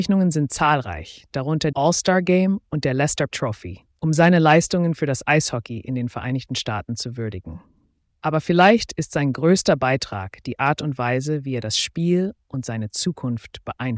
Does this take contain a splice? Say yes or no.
yes